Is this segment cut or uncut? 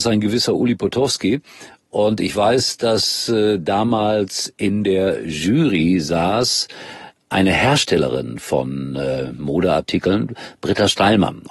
uncut